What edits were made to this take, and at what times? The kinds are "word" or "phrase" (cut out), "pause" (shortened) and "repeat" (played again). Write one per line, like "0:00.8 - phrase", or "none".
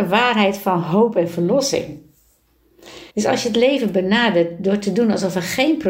0:03.1 - pause